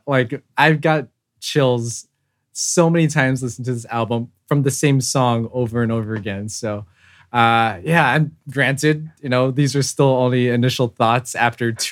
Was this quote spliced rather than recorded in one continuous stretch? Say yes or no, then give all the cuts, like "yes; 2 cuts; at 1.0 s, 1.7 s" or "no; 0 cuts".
no; 0 cuts